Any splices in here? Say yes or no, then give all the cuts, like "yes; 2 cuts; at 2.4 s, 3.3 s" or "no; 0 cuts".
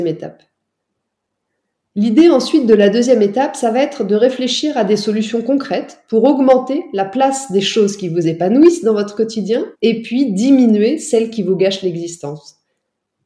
yes; 1 cut; at 9.7 s